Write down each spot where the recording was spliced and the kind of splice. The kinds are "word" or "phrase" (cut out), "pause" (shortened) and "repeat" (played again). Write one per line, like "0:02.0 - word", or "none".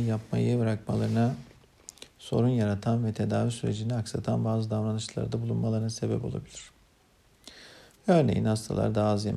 none